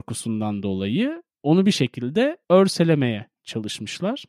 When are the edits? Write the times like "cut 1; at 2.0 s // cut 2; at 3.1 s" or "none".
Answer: none